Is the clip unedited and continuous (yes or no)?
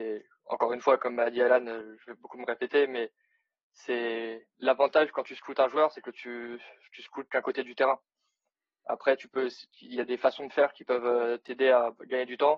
yes